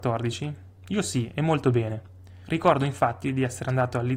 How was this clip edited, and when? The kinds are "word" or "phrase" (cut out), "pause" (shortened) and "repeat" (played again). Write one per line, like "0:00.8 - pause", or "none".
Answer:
none